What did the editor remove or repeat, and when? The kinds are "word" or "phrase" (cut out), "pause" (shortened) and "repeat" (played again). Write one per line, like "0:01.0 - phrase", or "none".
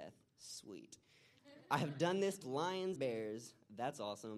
0:02.4 - word
0:03.0 - word